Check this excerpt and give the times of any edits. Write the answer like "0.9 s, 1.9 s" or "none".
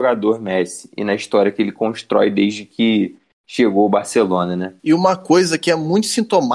4.8 s

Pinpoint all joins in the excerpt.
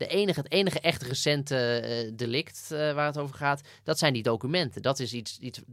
none

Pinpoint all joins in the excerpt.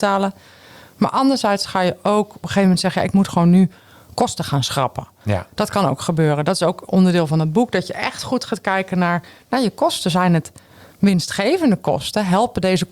none

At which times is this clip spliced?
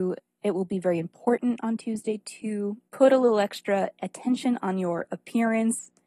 2.9 s

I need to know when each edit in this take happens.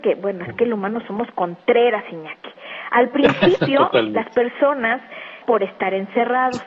5.4 s

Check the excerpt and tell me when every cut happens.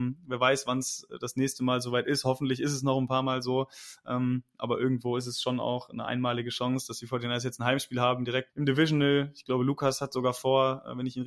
8.5 s

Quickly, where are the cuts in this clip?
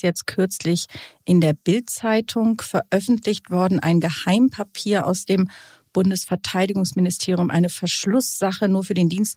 none

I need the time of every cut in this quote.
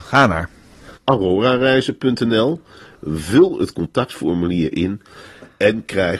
1.0 s

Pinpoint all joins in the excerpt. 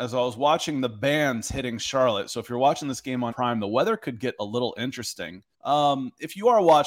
3.3 s, 5.5 s

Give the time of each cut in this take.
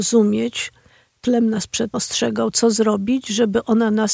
1.2 s, 1.9 s

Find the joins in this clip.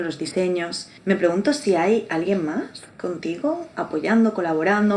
1.0 s

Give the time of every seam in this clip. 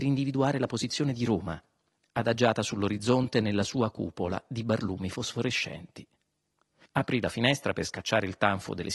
none

